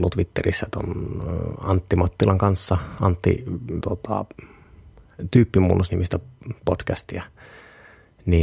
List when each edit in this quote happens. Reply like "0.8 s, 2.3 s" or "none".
3.8 s